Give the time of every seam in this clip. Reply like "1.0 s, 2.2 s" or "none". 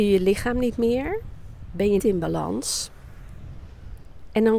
2.0 s